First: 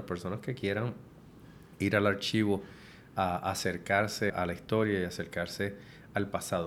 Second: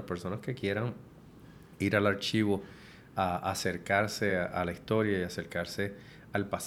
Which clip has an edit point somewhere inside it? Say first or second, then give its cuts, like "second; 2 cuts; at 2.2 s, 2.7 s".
first; 1 cut; at 4.3 s